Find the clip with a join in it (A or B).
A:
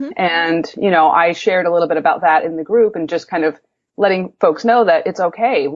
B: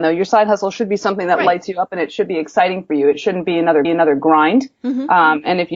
B